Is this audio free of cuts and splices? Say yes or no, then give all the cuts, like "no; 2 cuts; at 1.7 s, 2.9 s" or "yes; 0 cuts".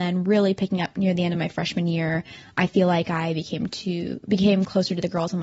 yes; 0 cuts